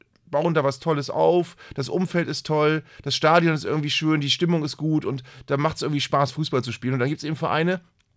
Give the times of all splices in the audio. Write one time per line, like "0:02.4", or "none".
none